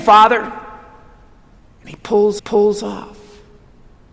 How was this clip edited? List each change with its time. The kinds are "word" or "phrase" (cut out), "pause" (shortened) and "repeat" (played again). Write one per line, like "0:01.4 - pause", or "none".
0:02.4 - repeat